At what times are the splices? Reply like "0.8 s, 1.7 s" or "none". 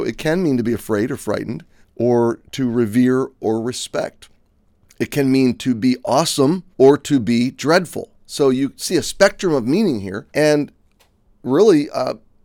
1.8 s, 4.7 s, 6.7 s, 10.3 s